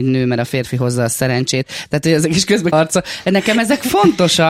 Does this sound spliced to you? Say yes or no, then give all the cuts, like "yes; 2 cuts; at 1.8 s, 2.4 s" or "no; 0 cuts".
yes; 1 cut; at 2.7 s